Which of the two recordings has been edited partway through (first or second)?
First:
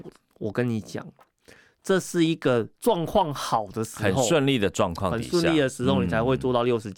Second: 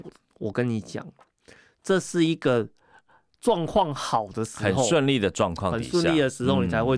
first